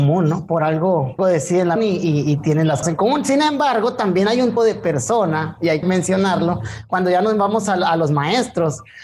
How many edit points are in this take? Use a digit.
5